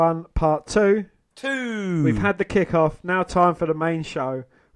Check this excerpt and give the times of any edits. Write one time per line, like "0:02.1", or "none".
none